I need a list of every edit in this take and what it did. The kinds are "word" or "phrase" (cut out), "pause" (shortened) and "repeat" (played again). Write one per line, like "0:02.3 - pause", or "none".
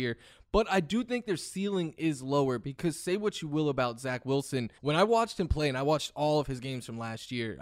0:04.8 - pause